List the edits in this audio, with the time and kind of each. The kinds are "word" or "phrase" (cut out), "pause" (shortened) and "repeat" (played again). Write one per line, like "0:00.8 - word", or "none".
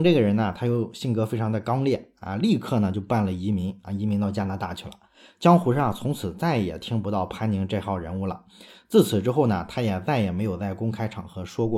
none